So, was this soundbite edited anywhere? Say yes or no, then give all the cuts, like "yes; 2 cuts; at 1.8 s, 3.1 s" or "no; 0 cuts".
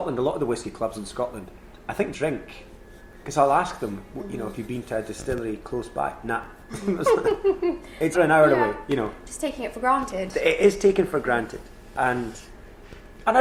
yes; 2 cuts; at 2.1 s, 8.1 s